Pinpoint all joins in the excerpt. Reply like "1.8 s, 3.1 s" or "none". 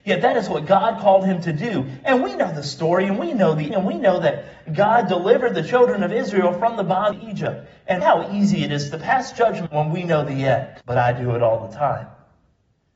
3.7 s, 7.1 s, 8.0 s, 9.7 s, 10.8 s